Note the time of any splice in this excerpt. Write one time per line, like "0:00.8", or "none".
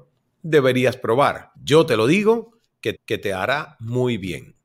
0:01.5
0:02.9